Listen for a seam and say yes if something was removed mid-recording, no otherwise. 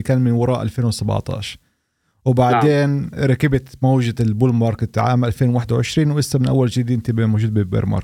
no